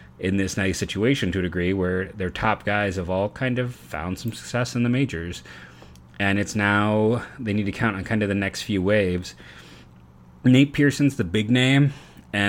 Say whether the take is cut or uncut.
uncut